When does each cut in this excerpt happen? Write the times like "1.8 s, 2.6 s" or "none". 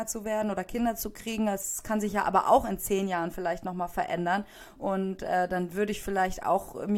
none